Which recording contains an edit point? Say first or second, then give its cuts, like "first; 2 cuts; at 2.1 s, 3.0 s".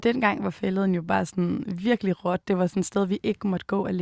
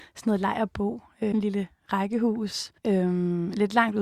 second; 2 cuts; at 1.3 s, 2.8 s